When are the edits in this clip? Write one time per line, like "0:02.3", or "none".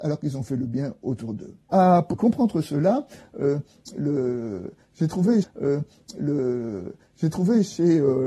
0:01.6
0:02.1
0:05.4